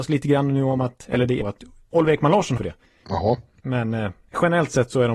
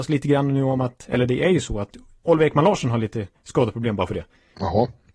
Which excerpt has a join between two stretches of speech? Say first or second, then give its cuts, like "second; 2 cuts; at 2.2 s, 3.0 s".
first; 2 cuts; at 1.4 s, 2.6 s